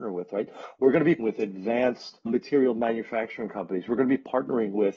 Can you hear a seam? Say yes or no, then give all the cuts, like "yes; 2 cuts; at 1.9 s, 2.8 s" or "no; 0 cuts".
yes; 2 cuts; at 1.2 s, 2.3 s